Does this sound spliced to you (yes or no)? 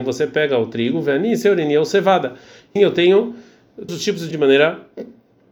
yes